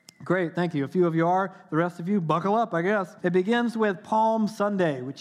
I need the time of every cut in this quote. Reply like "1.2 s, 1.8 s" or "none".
3.2 s

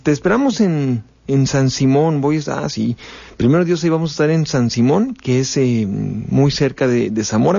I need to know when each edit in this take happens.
none

